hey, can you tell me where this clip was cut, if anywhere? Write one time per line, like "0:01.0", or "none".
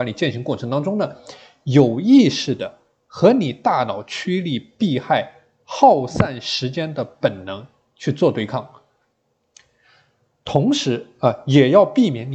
none